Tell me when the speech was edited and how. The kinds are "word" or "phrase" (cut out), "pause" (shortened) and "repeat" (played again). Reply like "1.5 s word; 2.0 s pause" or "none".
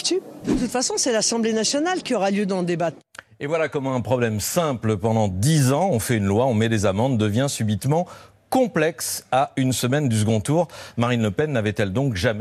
none